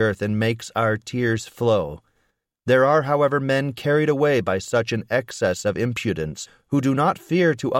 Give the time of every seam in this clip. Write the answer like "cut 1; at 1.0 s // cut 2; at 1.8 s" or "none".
none